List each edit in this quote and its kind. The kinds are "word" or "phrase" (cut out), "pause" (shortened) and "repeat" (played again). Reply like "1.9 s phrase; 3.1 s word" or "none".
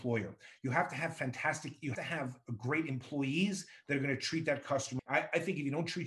1.9 s word; 5.0 s word